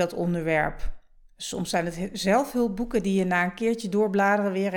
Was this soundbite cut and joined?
no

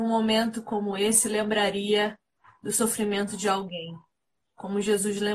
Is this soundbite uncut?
yes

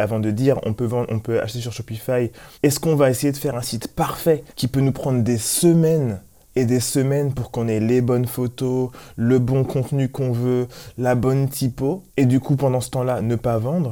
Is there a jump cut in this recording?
yes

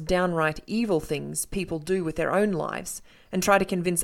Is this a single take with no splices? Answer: yes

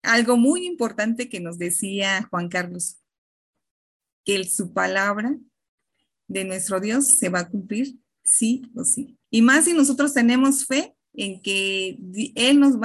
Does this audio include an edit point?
yes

